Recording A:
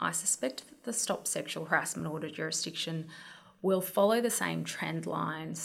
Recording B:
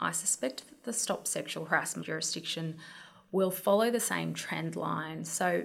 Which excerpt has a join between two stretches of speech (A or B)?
B